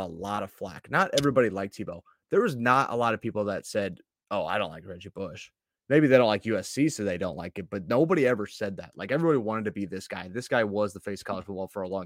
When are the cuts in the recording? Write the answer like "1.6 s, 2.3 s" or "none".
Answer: none